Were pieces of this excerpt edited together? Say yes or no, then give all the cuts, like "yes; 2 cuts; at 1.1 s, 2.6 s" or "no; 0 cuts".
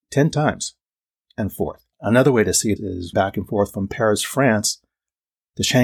yes; 4 cuts; at 1.2 s, 1.9 s, 2.8 s, 3.1 s